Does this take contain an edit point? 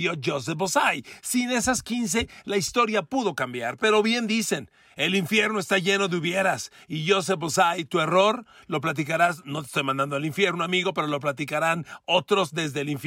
no; 0 cuts

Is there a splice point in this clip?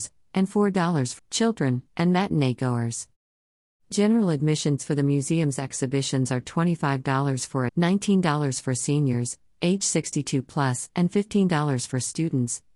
yes; 3 cuts; at 1.2 s, 4.8 s, 7.7 s

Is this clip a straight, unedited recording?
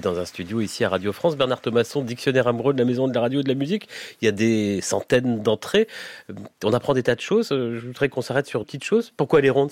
no; 1 cut; at 8.6 s

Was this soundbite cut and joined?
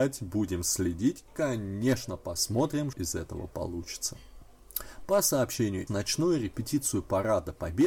yes; 3 cuts; at 1.3 s, 2.9 s, 5.9 s

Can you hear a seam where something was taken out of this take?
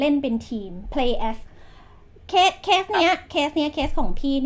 yes; 1 cut; at 1.4 s

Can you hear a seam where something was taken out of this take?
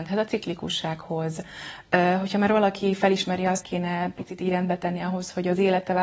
yes; 1 cut; at 3.6 s

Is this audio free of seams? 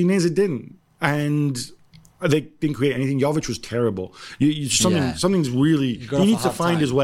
yes; 0 cuts

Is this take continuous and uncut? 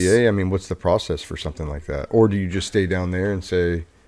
yes; 0 cuts

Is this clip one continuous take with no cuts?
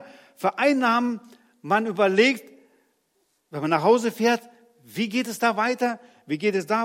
yes; 0 cuts

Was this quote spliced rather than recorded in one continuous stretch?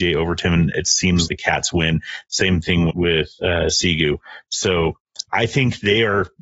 yes; 3 cuts; at 1.3 s, 2.9 s, 5.3 s

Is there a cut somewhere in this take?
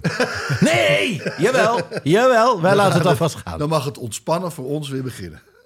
no; 0 cuts

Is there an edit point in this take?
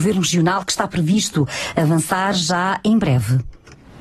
no; 0 cuts

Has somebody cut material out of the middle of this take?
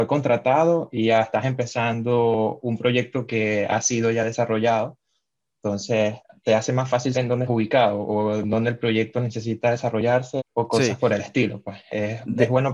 yes; 3 cuts; at 7.1 s, 7.5 s, 10.4 s

